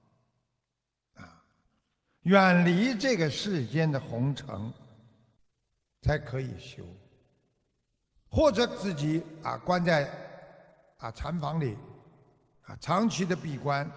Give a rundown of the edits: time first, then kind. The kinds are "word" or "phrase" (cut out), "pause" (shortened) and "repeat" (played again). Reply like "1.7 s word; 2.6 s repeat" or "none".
none